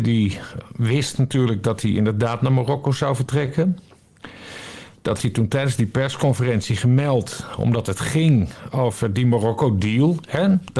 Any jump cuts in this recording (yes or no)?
yes